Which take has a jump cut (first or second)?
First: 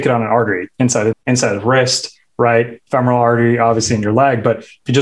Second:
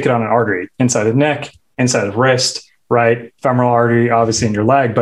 first